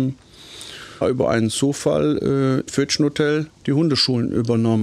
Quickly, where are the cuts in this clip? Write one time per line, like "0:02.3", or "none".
0:01.0
0:02.7
0:03.6

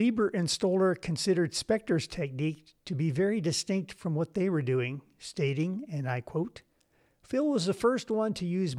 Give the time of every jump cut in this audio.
none

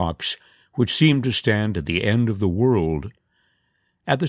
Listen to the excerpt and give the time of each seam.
none

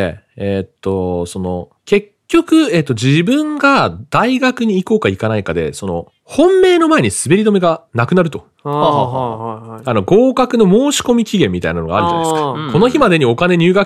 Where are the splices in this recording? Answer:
0:01.8
0:07.9
0:08.5

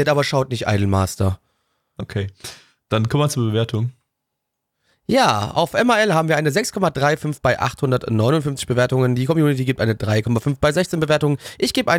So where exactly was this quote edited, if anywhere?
none

